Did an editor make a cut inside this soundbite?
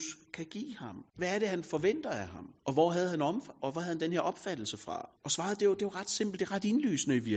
yes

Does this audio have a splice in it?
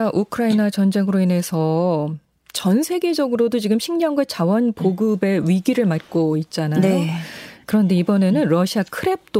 no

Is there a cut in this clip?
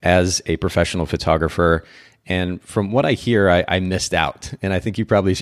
no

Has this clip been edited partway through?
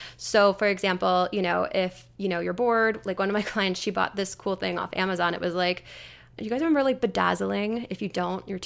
no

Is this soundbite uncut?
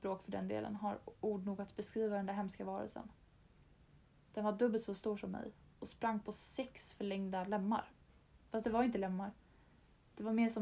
yes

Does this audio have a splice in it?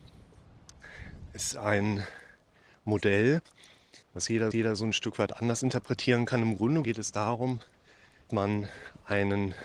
yes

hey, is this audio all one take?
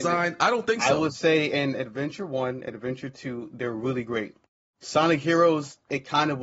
yes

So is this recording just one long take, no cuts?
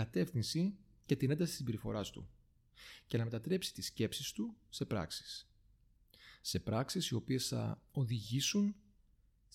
yes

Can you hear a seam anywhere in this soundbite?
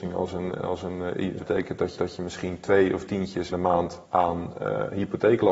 yes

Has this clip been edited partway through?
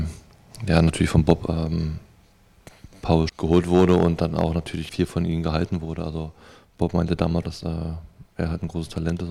yes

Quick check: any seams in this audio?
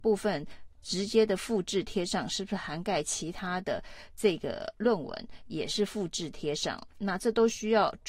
no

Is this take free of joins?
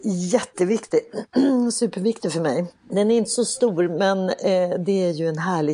no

